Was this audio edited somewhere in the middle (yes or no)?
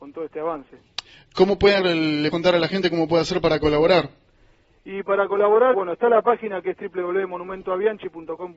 yes